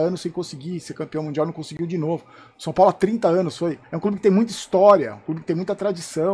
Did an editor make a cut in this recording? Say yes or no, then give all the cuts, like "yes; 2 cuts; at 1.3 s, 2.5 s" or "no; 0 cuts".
no; 0 cuts